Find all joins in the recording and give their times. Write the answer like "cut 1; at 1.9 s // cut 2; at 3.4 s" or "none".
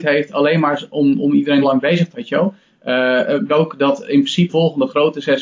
cut 1; at 1.6 s // cut 2; at 2.1 s // cut 3; at 3.5 s // cut 4; at 4.5 s